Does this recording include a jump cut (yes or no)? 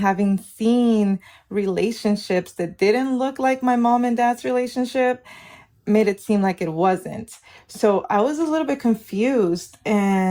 no